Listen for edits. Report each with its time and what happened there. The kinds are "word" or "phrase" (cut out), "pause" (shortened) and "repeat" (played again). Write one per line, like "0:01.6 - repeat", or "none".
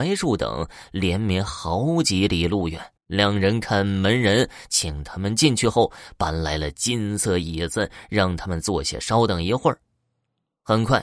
0:03.0 - pause